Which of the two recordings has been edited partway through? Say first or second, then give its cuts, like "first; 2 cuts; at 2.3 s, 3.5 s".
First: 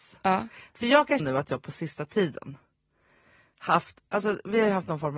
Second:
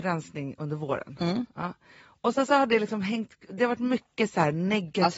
first; 1 cut; at 1.2 s